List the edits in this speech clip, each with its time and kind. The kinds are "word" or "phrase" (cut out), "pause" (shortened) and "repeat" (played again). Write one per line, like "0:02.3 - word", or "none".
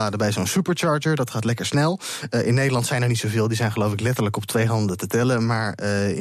none